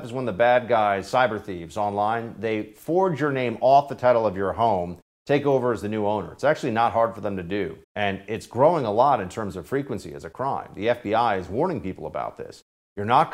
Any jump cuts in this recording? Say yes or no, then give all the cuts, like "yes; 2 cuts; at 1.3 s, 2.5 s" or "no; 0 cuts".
yes; 1 cut; at 7.8 s